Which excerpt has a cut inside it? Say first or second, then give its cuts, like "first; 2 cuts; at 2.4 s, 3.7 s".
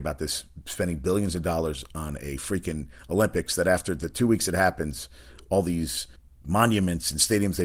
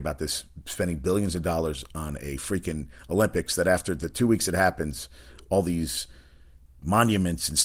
first; 1 cut; at 6.2 s